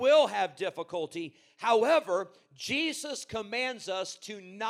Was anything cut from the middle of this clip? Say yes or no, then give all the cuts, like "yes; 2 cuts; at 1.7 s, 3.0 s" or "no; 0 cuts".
no; 0 cuts